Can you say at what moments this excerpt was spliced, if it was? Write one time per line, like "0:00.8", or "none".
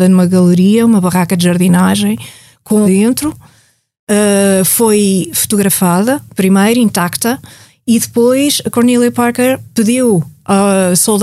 0:02.8